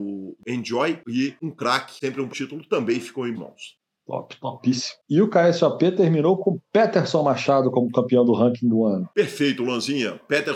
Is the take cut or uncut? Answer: cut